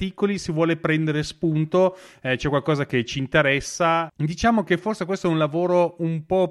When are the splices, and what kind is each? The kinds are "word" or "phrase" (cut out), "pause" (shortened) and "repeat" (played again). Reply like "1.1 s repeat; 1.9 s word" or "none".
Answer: none